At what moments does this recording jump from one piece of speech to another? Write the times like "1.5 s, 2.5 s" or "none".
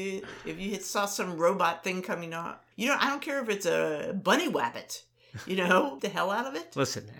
2.7 s, 6.0 s

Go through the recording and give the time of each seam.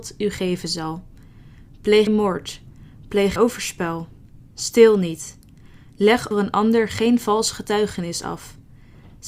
2.1 s, 3.4 s, 6.3 s

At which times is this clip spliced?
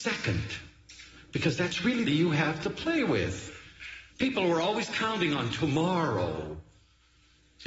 2.0 s, 4.1 s

